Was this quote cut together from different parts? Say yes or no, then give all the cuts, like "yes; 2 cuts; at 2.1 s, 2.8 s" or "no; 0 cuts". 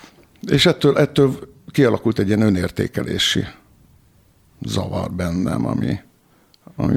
no; 0 cuts